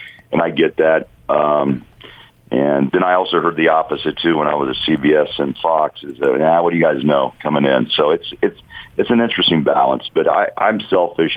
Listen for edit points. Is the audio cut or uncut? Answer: cut